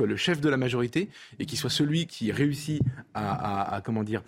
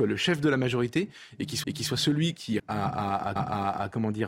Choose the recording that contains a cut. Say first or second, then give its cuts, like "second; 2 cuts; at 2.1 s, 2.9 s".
second; 3 cuts; at 1.6 s, 2.6 s, 3.4 s